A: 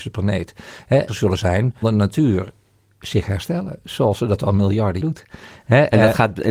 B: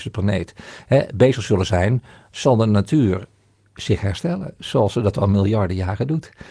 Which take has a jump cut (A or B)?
A